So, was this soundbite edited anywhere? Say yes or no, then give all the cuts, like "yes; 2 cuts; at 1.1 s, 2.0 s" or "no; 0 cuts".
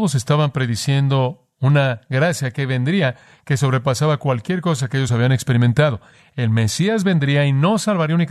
no; 0 cuts